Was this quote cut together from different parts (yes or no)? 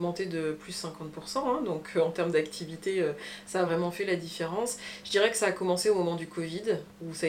no